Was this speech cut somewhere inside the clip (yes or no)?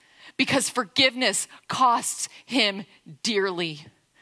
no